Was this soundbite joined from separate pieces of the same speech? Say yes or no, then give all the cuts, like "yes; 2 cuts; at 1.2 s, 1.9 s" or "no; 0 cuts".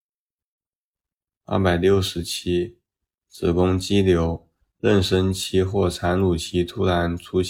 no; 0 cuts